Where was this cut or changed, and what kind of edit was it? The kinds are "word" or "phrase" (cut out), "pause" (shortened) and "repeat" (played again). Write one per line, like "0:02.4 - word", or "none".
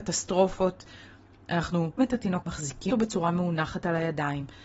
0:02.0 - word
0:02.4 - word
0:02.9 - word